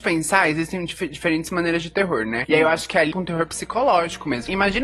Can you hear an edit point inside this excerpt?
yes; 1 cut; at 3.1 s

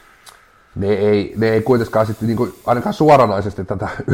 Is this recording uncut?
yes; 0 cuts

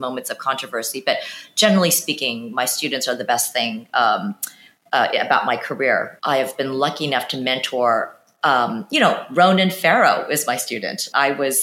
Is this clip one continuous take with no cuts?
yes; 0 cuts

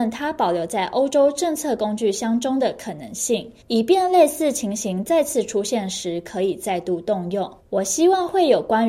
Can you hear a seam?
yes; 2 cuts; at 3.6 s, 7.6 s

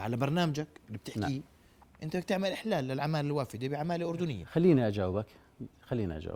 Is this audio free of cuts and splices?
yes; 0 cuts

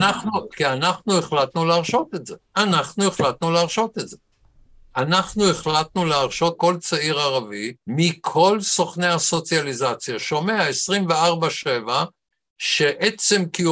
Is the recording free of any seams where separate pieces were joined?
no; 4 cuts; at 2.4 s, 6.6 s, 7.8 s, 10.2 s

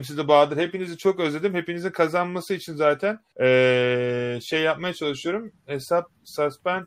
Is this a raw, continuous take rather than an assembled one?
no; 1 cut; at 3.3 s

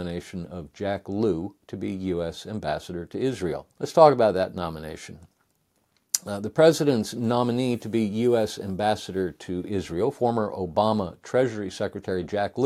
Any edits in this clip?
yes; 1 cut; at 3.7 s

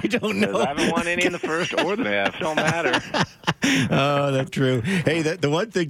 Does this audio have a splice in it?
yes; 3 cuts; at 2.0 s, 2.4 s, 4.5 s

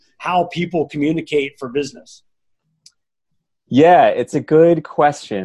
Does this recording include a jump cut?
no; 0 cuts

